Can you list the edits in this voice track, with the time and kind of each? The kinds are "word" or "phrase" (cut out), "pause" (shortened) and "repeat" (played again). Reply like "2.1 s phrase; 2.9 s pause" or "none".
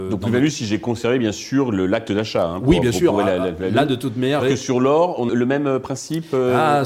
4.4 s word; 5.3 s word